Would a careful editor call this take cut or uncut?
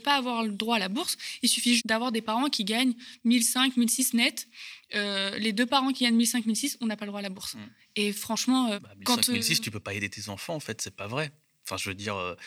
cut